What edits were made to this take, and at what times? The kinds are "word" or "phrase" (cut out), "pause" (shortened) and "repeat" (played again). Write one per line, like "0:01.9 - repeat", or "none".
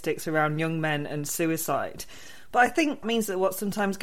0:03.0 - word

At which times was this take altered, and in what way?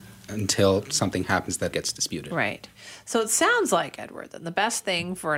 0:01.7 - word

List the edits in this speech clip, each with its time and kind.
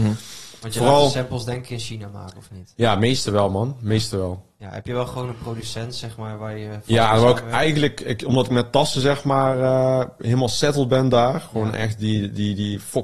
none

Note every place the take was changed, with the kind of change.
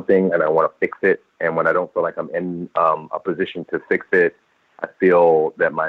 none

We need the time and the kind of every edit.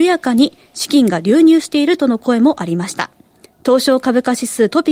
0:03.5 - pause

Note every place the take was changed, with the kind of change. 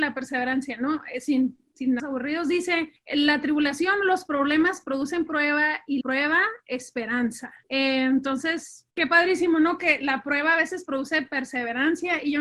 0:02.0 - word
0:03.0 - pause
0:05.3 - phrase
0:06.0 - word
0:07.6 - pause
0:08.9 - pause

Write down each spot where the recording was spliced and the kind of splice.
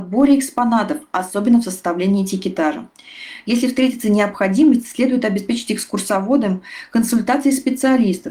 none

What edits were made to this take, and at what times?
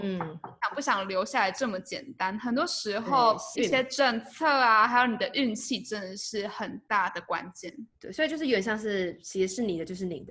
0:03.5 - word
0:07.9 - pause

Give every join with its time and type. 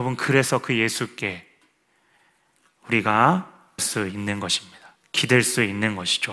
0:03.8 - word

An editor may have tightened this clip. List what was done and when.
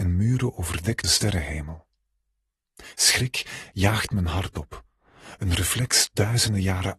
0:01.0 - phrase

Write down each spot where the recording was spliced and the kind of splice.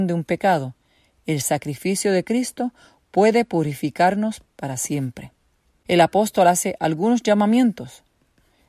none

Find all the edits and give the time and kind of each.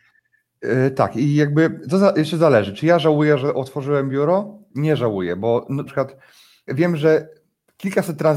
0:05.9 - word
0:06.7 - word

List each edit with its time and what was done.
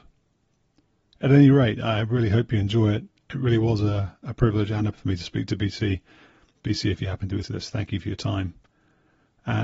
0:04.9 - word
0:07.4 - word

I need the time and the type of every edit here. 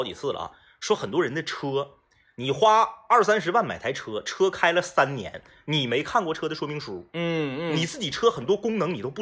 none

